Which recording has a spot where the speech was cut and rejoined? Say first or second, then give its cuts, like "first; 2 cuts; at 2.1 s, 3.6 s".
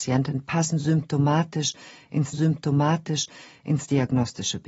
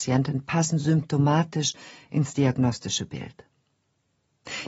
first; 1 cut; at 2.3 s